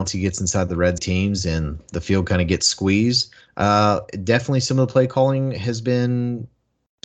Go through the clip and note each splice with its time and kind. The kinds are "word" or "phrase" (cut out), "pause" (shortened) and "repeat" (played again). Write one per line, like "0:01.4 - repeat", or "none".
0:01.0 - phrase
0:03.4 - pause